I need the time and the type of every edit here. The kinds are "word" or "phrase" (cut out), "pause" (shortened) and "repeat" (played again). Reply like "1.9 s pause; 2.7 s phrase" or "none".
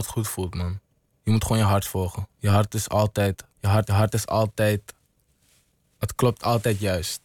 3.5 s pause; 3.9 s repeat